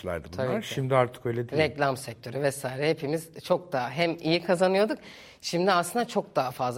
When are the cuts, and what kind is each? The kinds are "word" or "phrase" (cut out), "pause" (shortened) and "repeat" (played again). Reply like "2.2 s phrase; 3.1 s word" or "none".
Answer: none